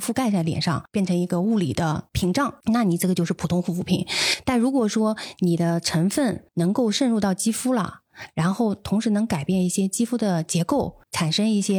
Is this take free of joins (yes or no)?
no